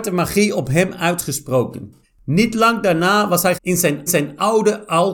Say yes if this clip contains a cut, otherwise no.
yes